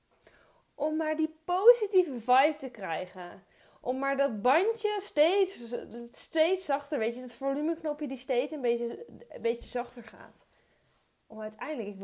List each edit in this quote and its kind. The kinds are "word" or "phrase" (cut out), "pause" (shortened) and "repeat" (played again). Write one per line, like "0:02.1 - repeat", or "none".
none